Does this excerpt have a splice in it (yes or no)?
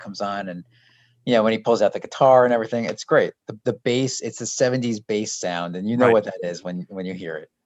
no